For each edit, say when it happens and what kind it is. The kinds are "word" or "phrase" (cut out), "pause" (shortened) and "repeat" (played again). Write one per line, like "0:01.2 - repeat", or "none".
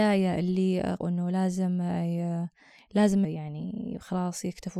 0:01.0 - word
0:03.2 - word